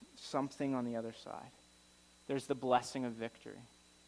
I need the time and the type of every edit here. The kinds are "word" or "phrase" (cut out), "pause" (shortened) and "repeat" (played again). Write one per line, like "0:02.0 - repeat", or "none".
none